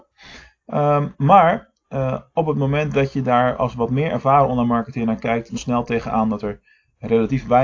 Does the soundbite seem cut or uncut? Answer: cut